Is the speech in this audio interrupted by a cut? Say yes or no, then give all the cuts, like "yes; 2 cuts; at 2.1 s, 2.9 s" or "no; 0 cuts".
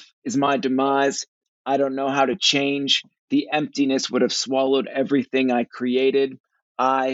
no; 0 cuts